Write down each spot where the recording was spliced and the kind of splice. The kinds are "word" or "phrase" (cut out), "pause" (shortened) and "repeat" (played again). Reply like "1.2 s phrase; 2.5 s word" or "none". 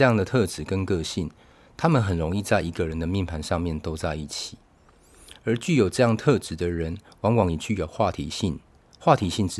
none